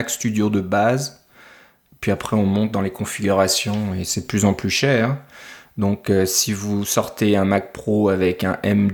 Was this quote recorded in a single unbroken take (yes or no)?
yes